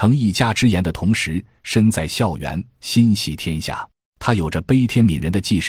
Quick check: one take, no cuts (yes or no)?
no